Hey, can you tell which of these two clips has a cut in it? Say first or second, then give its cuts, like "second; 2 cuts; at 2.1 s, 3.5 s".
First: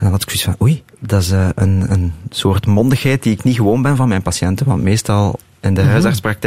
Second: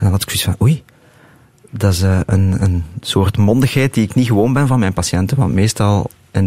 first; 1 cut; at 0.9 s